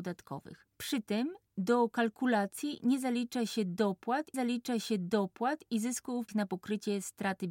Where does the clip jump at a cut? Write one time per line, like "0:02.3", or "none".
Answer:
0:04.3
0:06.3